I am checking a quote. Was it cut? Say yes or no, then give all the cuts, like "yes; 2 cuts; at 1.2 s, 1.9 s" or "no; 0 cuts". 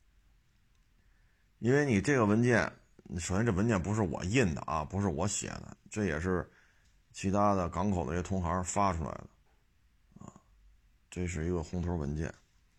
no; 0 cuts